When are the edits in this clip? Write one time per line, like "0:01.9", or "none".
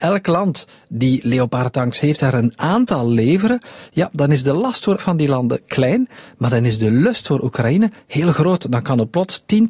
0:05.0